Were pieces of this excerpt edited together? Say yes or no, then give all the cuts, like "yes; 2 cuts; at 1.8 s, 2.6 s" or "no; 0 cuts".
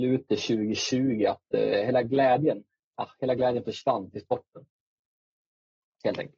no; 0 cuts